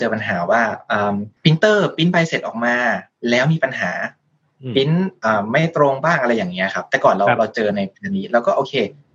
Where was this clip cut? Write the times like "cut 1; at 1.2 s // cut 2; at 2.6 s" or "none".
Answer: cut 1; at 1.4 s